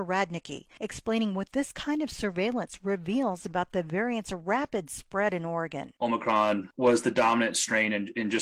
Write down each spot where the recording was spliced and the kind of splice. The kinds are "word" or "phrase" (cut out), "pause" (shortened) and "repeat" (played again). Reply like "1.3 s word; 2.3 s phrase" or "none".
none